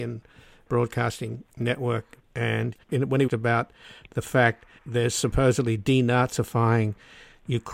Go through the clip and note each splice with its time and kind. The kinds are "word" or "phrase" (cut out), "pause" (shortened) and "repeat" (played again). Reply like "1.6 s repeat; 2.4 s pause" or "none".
1.5 s pause; 2.8 s pause; 3.3 s phrase; 4.8 s word